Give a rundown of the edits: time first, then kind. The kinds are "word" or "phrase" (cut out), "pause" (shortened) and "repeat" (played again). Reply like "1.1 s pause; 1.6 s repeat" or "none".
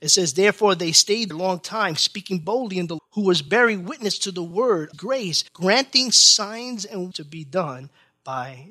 1.3 s word; 3.0 s word; 4.9 s phrase; 5.5 s pause; 7.1 s word